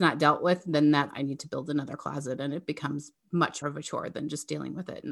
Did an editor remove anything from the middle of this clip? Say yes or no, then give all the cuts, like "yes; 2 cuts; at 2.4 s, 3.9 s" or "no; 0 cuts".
yes; 2 cuts; at 1.1 s, 3.6 s